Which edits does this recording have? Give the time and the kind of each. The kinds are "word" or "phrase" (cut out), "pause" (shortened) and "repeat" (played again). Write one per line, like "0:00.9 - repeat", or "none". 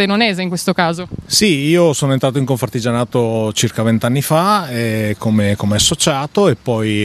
none